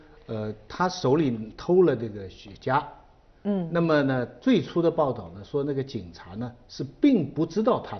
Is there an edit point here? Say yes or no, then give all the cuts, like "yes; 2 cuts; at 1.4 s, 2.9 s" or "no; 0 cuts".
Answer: no; 0 cuts